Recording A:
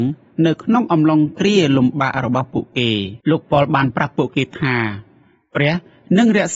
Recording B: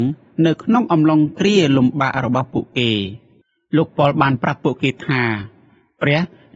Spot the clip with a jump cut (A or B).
A